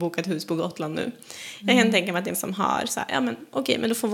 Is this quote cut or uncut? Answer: cut